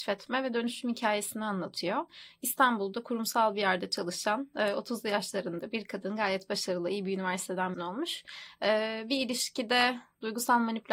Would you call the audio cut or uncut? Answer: cut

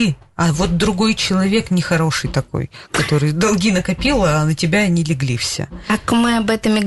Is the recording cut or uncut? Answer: uncut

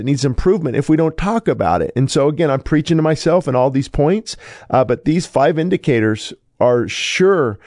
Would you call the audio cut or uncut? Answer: uncut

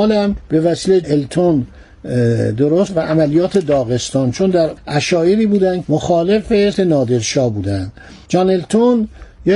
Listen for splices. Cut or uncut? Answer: cut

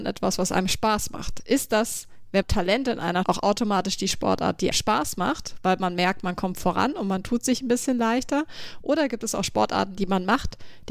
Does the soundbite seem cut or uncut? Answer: cut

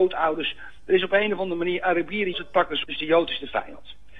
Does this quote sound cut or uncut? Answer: cut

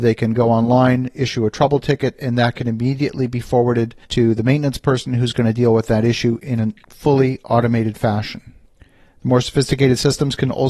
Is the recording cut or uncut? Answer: cut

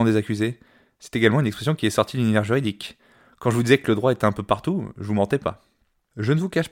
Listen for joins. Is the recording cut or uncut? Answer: uncut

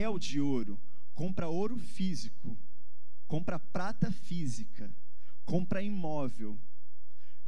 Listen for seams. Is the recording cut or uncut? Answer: uncut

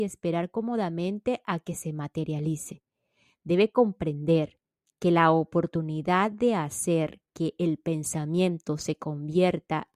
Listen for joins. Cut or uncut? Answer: uncut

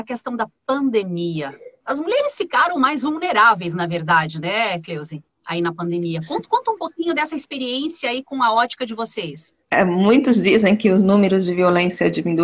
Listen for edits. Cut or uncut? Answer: uncut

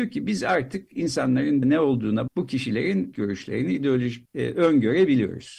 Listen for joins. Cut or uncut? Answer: cut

